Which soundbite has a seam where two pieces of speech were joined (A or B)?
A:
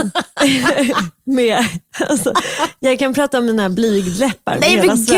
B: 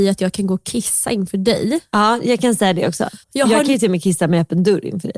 B